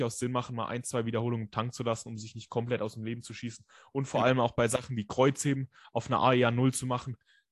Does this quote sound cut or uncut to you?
uncut